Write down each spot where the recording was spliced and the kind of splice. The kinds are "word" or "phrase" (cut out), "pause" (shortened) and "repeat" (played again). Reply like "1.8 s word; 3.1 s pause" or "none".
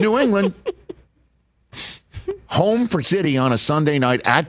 3.0 s word